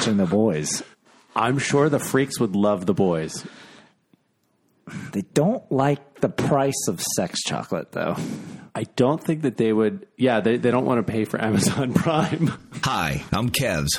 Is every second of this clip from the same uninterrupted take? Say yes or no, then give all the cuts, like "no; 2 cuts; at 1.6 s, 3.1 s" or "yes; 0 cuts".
no; 2 cuts; at 0.9 s, 8.7 s